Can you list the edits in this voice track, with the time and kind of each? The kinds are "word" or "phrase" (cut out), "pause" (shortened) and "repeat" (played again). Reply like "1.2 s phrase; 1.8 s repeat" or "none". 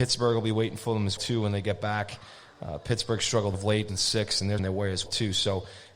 1.2 s word; 3.5 s word; 3.9 s word; 4.6 s word; 5.1 s word